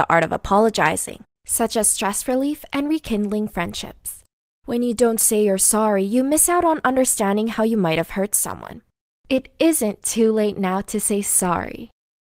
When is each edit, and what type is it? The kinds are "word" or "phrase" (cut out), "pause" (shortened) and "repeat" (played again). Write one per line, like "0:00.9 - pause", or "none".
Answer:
none